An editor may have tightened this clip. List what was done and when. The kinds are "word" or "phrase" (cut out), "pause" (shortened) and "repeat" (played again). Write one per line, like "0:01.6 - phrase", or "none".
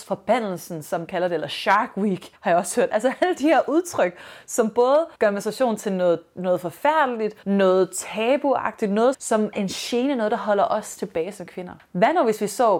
0:01.1 - phrase
0:02.3 - pause
0:05.1 - pause
0:07.4 - pause
0:09.1 - word
0:09.5 - word